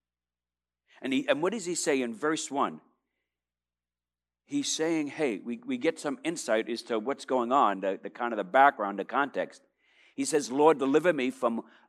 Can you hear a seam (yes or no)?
no